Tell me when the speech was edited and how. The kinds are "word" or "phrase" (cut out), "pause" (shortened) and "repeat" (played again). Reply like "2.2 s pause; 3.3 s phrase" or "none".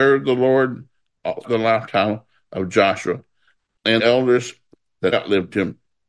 1.4 s word; 4.0 s word; 5.1 s word